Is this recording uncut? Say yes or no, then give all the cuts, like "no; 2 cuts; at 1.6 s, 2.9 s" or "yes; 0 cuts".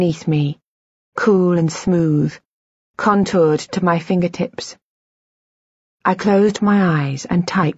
yes; 0 cuts